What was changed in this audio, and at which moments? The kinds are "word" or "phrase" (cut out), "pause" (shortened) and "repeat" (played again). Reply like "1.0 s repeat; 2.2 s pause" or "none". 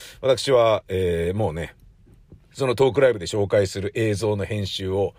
2.4 s pause